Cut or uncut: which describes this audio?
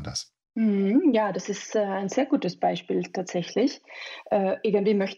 uncut